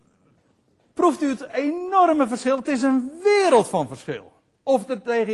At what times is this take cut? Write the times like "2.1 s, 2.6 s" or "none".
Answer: none